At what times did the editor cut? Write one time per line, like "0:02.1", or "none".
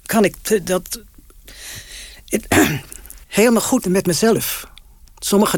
0:03.2
0:03.8